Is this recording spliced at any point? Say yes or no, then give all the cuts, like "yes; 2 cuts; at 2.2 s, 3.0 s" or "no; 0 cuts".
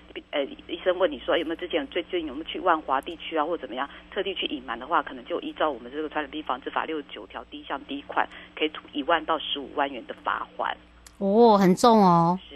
no; 0 cuts